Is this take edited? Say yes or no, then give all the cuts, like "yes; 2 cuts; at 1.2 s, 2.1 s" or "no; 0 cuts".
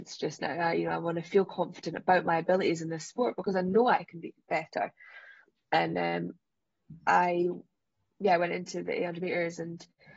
no; 0 cuts